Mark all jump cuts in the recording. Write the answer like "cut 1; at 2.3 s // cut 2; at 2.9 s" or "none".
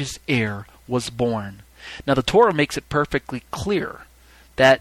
none